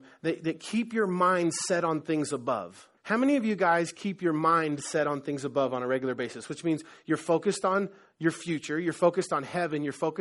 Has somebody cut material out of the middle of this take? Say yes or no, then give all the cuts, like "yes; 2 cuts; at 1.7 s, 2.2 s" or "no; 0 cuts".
yes; 1 cut; at 3.0 s